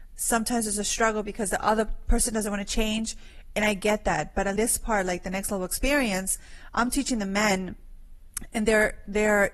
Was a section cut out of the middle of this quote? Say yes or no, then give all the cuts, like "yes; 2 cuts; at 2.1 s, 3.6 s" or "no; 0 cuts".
yes; 1 cut; at 4.6 s